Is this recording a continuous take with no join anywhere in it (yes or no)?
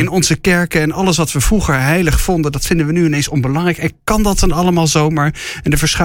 yes